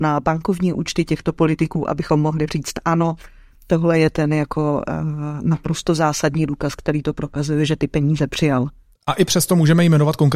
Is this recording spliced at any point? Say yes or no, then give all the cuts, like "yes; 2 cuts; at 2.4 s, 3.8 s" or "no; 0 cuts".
no; 0 cuts